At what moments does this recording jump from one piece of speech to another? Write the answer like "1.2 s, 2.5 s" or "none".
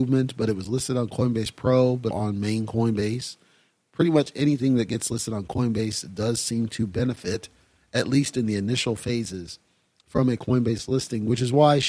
2.1 s